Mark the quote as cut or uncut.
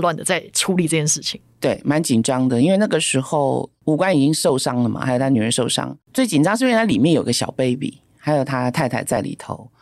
cut